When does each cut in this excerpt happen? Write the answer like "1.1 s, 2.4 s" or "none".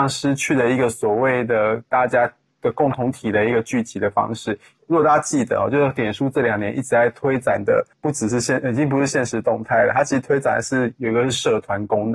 7.9 s